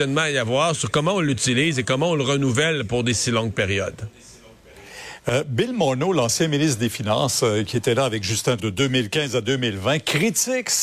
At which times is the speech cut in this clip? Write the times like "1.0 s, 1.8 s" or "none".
8.6 s